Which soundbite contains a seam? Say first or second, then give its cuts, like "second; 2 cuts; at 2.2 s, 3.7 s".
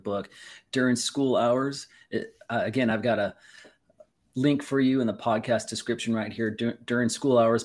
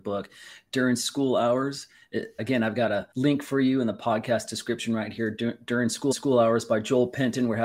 second; 3 cuts; at 2.4 s, 3.1 s, 6.1 s